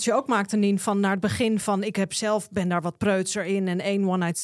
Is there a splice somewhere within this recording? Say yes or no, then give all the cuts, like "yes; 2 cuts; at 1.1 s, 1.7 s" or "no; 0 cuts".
no; 0 cuts